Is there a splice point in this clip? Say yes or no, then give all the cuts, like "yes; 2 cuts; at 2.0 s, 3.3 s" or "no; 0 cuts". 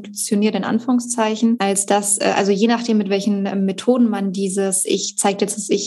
no; 0 cuts